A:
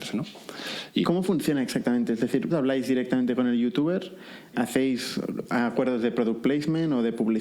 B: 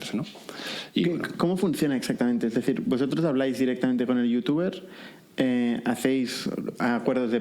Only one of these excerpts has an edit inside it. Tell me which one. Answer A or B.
A